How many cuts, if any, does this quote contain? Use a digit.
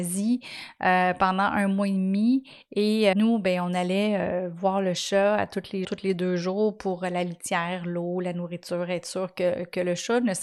2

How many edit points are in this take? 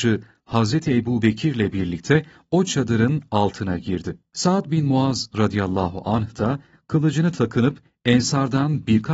0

